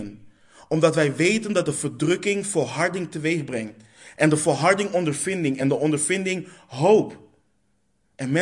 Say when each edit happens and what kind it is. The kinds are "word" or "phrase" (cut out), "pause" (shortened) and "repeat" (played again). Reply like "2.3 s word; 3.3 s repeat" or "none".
none

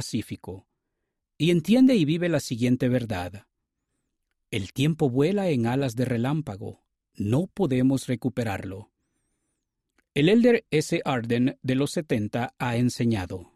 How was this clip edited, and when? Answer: 10.7 s word

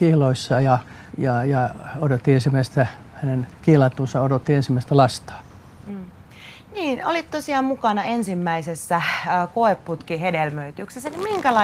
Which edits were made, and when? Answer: 1.1 s pause; 3.5 s pause

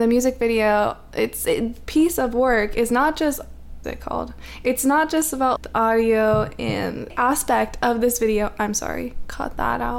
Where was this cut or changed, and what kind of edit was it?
1.9 s word; 3.8 s phrase; 5.6 s word; 7.1 s phrase

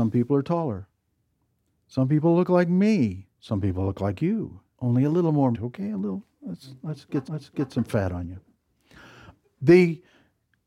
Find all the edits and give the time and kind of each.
3.3 s pause; 4.7 s pause; 5.5 s word; 7.2 s repeat

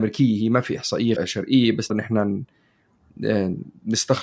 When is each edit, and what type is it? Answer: 1.2 s word; 1.9 s word

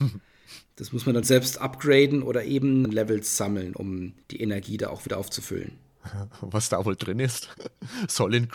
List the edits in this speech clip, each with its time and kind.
1.2 s word; 2.8 s phrase; 4.2 s pause

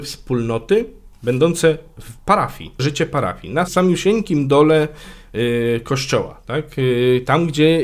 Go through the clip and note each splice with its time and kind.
1.1 s word; 2.8 s word; 3.7 s word

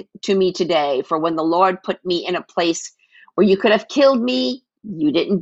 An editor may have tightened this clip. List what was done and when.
none

